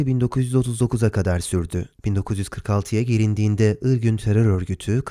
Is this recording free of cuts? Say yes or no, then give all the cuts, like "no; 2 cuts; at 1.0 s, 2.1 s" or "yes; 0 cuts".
no; 1 cut; at 1.9 s